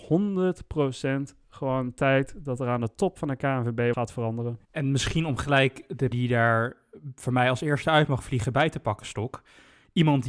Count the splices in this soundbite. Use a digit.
3